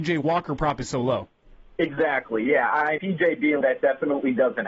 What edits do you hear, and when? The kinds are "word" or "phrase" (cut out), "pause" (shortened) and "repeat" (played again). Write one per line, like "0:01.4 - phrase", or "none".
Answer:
0:03.0 - word
0:03.6 - word